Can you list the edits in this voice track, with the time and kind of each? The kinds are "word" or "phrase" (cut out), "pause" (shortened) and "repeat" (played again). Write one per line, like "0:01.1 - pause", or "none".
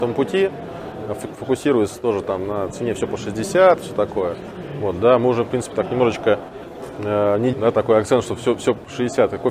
0:07.5 - word